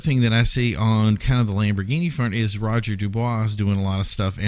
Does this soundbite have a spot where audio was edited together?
no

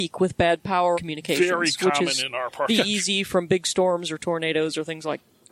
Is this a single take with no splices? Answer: no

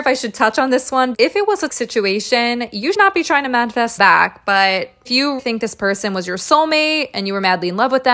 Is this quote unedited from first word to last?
no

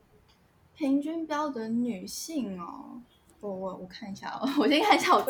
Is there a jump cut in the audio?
yes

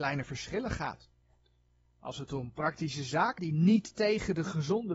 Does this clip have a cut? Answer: yes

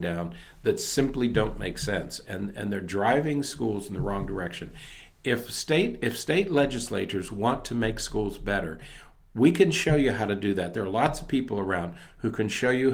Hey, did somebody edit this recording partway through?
no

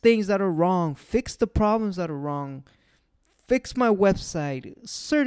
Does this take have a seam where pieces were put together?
no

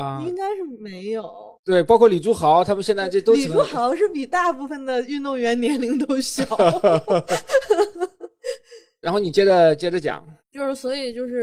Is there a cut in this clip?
yes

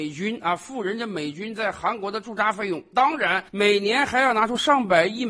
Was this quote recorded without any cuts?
no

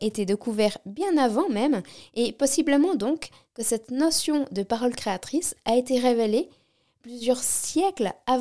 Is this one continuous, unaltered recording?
yes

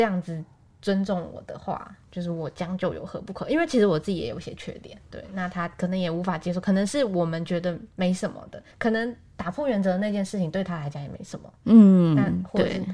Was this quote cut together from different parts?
yes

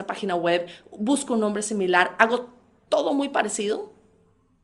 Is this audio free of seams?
yes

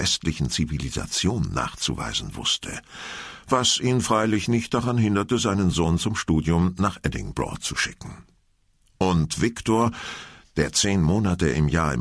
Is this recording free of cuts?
yes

